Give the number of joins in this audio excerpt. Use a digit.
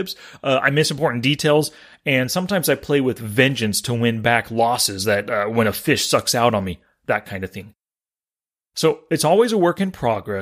0